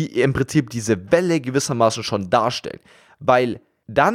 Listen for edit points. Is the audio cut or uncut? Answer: uncut